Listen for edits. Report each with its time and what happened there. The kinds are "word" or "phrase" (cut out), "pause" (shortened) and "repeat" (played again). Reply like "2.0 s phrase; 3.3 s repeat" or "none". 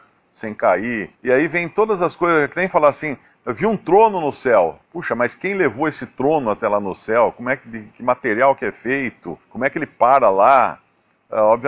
1.1 s pause; 4.9 s pause; 9.4 s pause